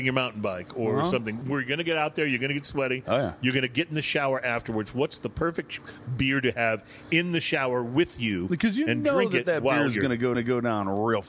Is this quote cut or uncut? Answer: cut